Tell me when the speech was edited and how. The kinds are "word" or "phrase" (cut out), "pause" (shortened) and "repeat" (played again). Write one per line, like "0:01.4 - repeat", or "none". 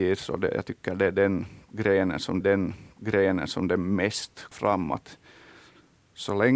0:02.4 - repeat
0:04.5 - word